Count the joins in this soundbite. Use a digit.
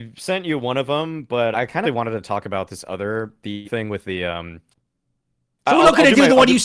3